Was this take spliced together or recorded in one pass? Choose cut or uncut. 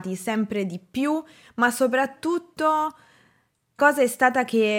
cut